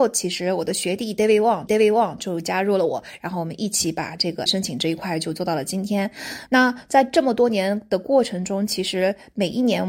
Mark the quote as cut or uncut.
cut